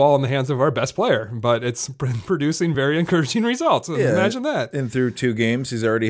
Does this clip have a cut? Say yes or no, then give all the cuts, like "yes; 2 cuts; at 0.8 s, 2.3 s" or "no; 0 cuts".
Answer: no; 0 cuts